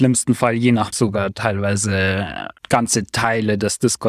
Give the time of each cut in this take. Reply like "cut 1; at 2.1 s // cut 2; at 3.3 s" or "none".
cut 1; at 0.9 s // cut 2; at 2.6 s